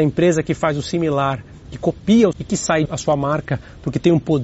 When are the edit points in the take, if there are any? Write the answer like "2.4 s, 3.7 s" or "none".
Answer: 2.3 s, 2.9 s

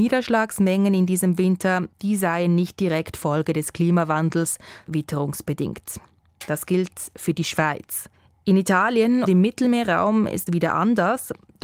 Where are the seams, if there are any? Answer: 4.9 s, 9.3 s, 10.5 s

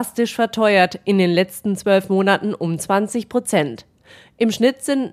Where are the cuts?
none

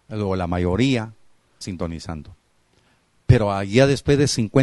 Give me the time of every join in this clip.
1.6 s

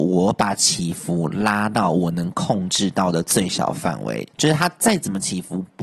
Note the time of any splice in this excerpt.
4.3 s

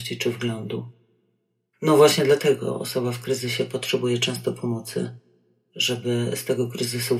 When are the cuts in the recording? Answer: none

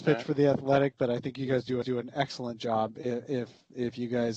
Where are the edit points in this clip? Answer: 1.8 s

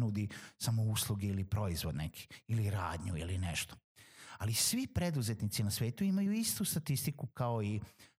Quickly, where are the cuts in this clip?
none

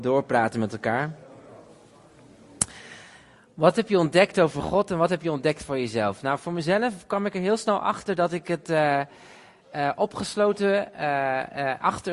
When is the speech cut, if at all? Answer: none

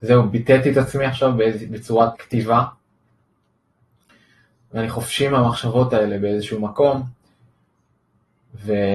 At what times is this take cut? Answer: 2.1 s

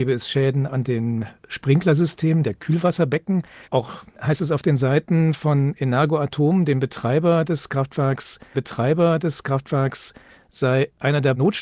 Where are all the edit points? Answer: 3.6 s, 8.5 s

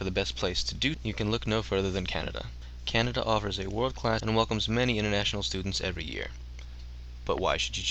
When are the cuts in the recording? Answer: 0.9 s, 4.2 s

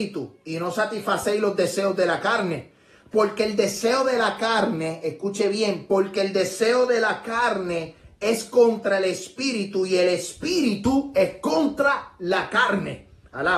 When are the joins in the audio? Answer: none

